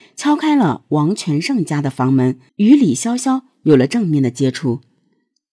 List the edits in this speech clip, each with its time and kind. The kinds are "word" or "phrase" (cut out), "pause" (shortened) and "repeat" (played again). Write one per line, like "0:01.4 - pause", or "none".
0:02.5 - pause